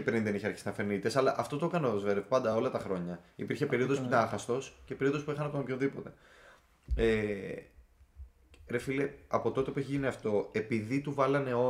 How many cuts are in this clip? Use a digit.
0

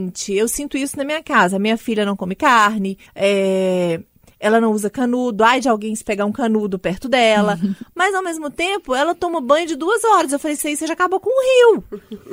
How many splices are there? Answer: 1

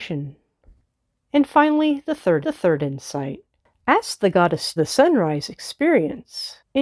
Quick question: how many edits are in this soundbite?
2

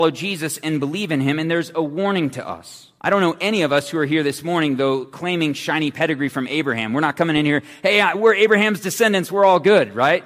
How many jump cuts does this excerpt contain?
1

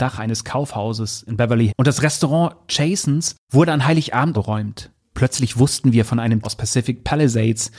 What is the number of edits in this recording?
4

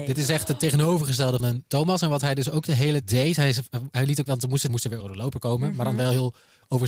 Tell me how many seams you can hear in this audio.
5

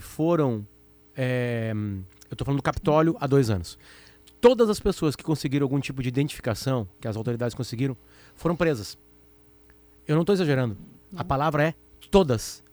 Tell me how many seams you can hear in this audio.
0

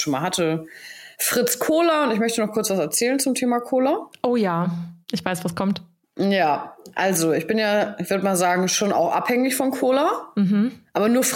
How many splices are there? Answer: 3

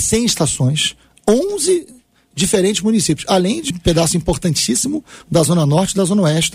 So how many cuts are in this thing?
1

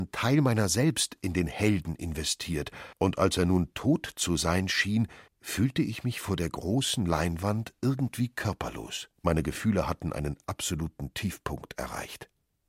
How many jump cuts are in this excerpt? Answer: 3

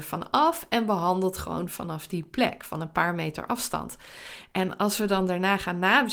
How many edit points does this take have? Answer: 0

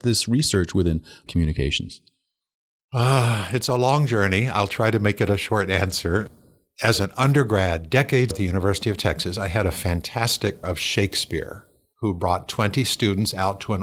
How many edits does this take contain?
3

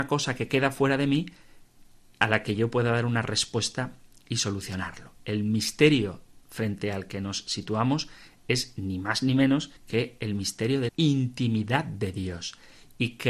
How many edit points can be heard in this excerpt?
2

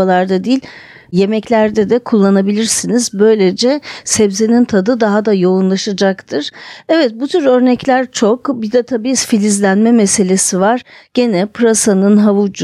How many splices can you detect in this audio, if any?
0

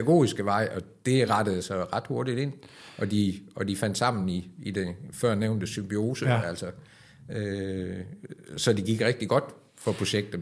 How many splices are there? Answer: 0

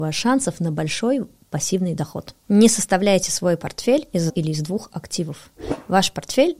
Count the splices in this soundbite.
1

